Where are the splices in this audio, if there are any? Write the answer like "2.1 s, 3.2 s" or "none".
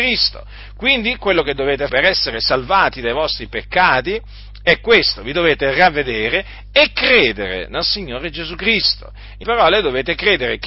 1.9 s, 9.4 s